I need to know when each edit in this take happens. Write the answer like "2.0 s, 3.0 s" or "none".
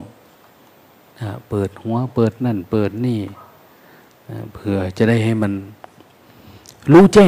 none

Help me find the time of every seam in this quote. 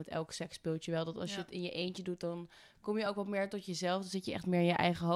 none

